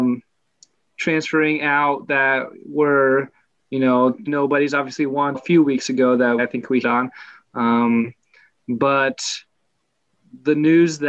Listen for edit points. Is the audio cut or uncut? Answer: cut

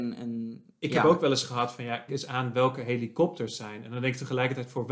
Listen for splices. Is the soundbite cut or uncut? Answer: cut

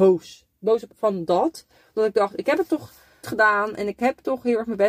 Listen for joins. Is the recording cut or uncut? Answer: cut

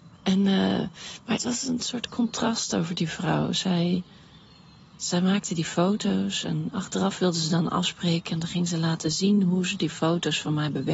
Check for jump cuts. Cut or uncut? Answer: uncut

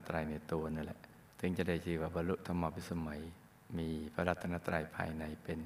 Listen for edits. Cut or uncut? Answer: cut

